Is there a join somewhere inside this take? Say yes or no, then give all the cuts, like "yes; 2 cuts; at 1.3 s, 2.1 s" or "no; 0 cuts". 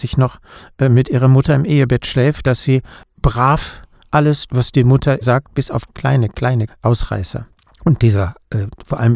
yes; 5 cuts; at 2.4 s, 4.5 s, 5.2 s, 5.9 s, 6.7 s